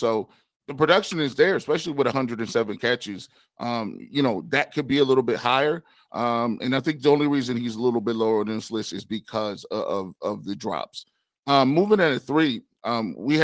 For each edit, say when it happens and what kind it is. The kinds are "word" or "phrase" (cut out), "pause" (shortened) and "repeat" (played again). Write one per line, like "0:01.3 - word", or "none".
none